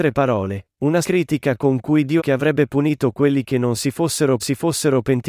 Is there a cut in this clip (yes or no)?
yes